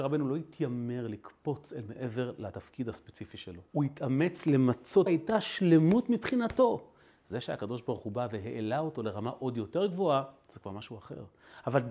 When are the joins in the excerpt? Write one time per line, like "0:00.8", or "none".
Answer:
0:03.7
0:05.1